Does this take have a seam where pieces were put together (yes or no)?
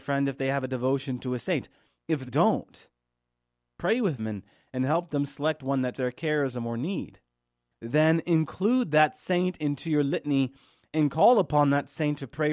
yes